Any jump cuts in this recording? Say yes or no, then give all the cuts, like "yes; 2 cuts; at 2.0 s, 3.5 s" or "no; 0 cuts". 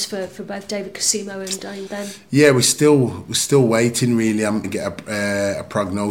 yes; 2 cuts; at 1.9 s, 4.6 s